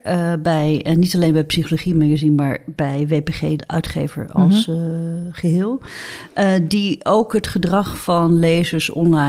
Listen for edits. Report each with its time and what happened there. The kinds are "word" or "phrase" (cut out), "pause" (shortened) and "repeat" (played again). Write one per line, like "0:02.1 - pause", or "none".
0:03.6 - word

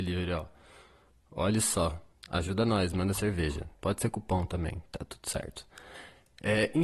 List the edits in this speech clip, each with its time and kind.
0:02.1 - pause
0:03.7 - pause

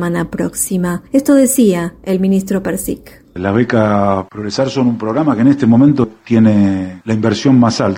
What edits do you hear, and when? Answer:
0:01.1 - pause

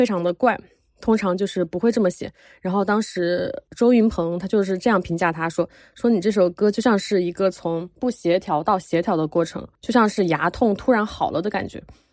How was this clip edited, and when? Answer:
none

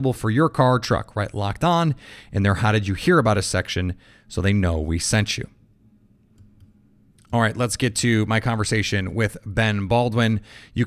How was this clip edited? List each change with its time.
0:06.3 - pause

